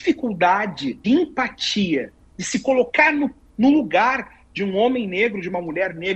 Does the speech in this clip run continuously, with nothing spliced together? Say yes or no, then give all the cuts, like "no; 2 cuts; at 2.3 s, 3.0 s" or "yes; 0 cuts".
no; 1 cut; at 1.0 s